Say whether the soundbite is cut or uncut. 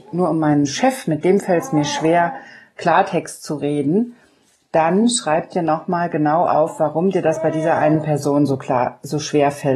uncut